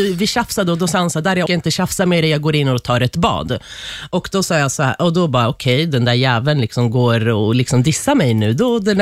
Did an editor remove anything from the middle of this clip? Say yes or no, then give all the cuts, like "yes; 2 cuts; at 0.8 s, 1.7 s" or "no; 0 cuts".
yes; 1 cut; at 1.5 s